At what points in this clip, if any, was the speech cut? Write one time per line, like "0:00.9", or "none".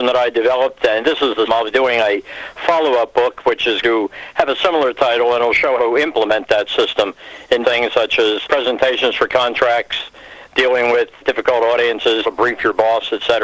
0:01.0
0:01.5
0:03.8
0:05.8
0:07.6
0:08.5
0:11.2
0:12.2